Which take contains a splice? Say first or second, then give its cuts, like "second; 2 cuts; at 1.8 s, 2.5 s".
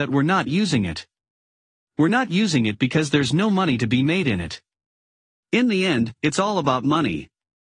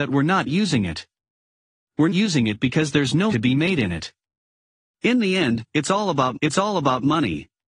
second; 3 cuts; at 2.1 s, 3.3 s, 6.3 s